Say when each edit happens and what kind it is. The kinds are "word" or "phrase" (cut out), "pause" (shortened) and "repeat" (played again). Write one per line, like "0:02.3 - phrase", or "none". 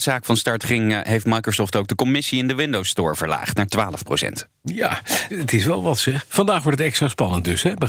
0:05.3 - phrase